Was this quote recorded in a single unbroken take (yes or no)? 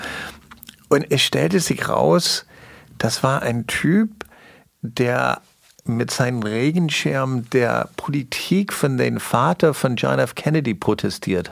yes